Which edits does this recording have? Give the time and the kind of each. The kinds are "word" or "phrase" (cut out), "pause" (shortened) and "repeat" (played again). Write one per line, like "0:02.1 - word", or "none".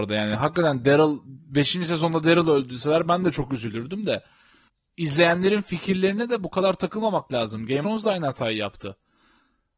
0:07.8 - word

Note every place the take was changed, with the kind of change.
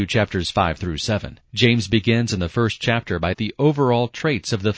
0:01.4 - pause
0:03.3 - word

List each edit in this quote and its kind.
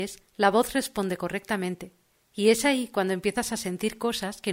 none

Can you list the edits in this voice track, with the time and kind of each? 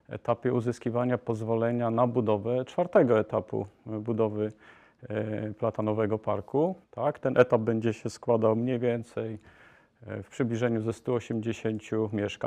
0:06.8 - pause

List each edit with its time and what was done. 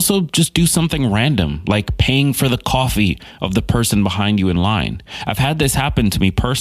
none

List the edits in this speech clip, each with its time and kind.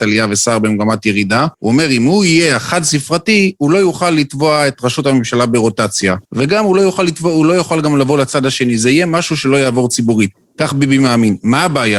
0:01.5 - pause
0:06.2 - pause

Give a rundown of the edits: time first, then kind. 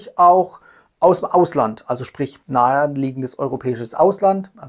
0:02.4 - pause

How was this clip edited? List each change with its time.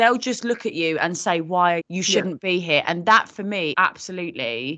0:01.8 - phrase
0:03.7 - word

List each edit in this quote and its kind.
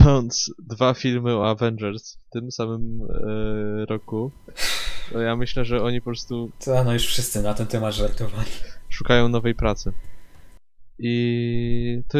none

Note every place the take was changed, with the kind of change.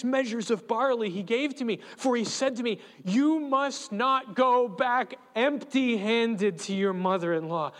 none

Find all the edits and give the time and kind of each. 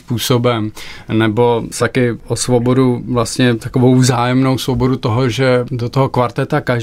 0:01.8 - word

